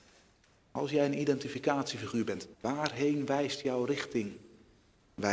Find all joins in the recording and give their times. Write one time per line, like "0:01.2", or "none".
0:02.5